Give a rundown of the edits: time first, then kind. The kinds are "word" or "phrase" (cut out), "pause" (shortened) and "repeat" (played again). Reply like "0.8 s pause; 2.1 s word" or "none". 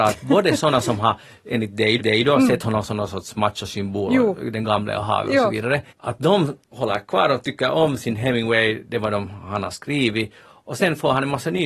2.0 s repeat; 5.9 s pause; 6.6 s pause